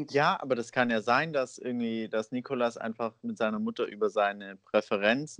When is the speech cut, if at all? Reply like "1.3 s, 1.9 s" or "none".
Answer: none

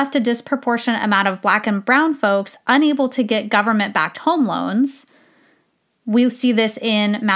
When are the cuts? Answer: none

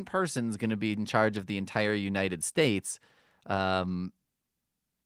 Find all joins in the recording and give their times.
none

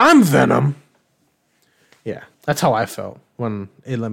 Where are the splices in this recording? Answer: 2.3 s

